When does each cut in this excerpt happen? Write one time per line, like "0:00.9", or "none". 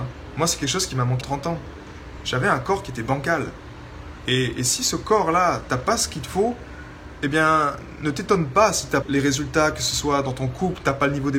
0:01.2
0:09.0